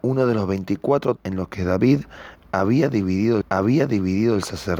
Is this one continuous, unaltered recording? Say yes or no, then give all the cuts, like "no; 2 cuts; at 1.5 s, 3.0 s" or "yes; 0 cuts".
no; 2 cuts; at 1.2 s, 3.4 s